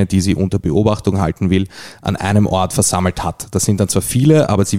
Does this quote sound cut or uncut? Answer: uncut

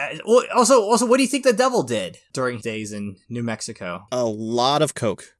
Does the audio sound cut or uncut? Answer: cut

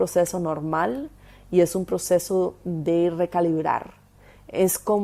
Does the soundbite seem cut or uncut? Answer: uncut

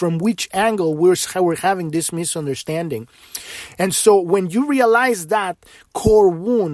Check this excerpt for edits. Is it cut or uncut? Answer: uncut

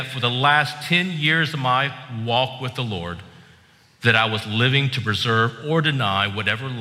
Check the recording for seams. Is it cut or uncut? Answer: uncut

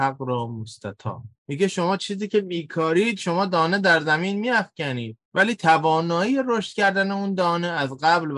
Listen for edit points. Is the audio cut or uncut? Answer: uncut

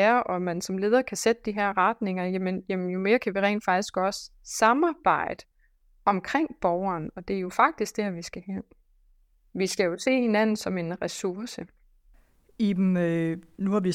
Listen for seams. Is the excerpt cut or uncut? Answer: uncut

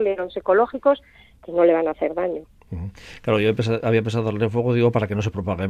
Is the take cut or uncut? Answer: uncut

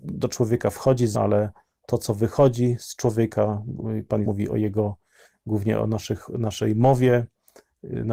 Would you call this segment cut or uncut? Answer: cut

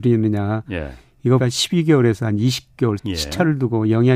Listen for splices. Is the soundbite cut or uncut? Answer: cut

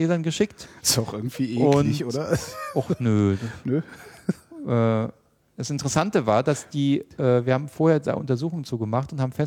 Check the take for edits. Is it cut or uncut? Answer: uncut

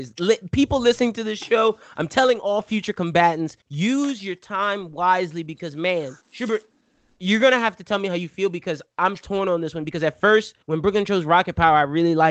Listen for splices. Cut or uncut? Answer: cut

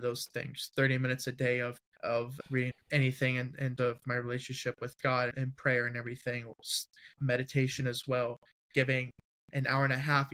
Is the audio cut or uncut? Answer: cut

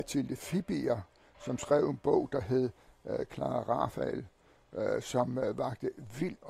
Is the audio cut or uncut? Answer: uncut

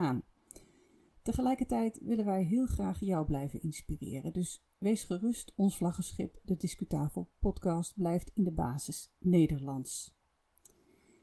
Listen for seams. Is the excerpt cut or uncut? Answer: uncut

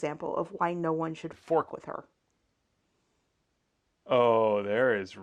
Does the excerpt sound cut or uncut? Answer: uncut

